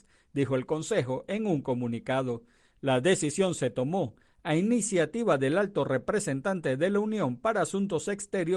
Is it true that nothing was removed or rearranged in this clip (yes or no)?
yes